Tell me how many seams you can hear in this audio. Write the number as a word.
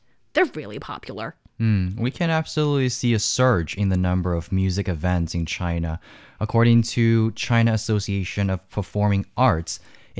zero